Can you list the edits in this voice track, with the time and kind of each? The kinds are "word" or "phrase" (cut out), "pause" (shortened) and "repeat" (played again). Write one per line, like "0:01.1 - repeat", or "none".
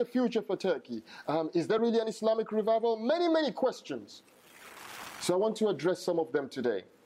none